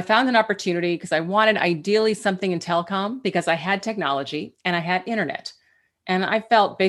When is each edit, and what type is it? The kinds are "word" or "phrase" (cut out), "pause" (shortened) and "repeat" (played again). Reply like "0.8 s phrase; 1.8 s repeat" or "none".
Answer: none